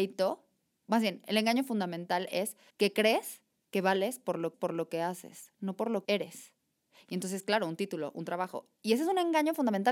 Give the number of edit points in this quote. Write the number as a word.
three